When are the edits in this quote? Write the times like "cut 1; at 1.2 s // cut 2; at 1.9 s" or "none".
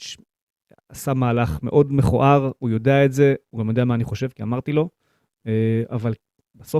none